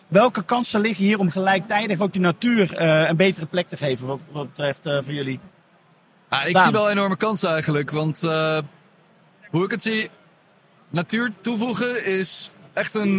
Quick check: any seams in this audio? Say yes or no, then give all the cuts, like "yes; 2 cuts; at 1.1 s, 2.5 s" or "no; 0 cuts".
no; 0 cuts